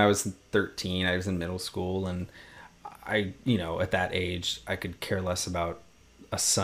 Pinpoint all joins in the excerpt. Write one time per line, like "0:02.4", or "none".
0:03.0